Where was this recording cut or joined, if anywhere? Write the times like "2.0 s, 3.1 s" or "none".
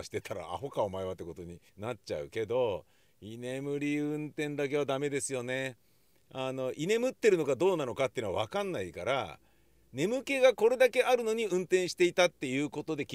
1.7 s